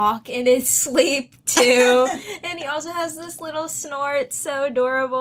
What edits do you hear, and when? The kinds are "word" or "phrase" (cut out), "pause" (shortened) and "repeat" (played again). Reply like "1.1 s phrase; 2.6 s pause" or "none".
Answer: none